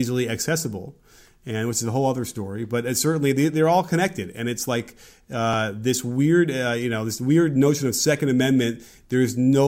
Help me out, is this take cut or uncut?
uncut